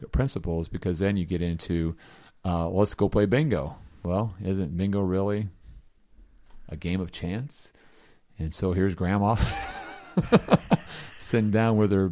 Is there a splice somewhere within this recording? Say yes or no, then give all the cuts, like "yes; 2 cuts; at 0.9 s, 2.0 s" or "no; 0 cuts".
no; 0 cuts